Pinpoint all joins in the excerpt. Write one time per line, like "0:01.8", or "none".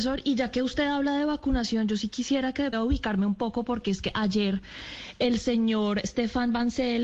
0:02.7